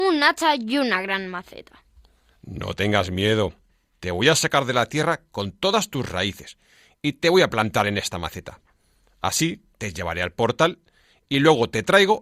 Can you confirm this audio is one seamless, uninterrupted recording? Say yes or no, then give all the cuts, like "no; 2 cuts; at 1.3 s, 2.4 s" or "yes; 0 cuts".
yes; 0 cuts